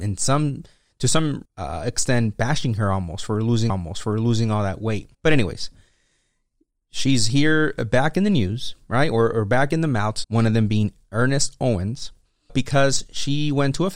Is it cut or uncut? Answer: cut